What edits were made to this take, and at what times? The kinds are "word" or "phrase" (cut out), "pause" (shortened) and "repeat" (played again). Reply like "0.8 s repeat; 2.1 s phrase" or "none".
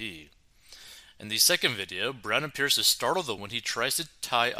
3.4 s word